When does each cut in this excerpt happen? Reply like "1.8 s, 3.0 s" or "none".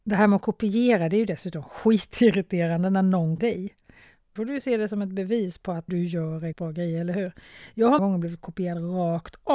3.4 s, 4.4 s, 5.9 s, 6.5 s, 8.0 s